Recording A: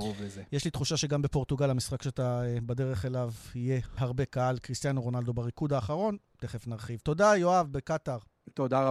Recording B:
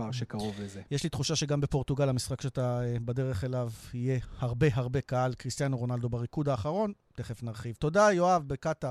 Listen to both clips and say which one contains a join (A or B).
A